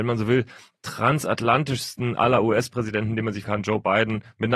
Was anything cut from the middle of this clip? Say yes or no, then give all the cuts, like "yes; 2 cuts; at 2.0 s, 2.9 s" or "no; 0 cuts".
yes; 1 cut; at 3.4 s